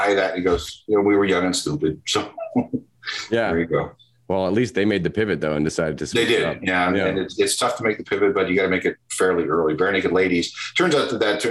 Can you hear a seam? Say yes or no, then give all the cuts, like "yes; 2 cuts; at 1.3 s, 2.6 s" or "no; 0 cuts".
no; 0 cuts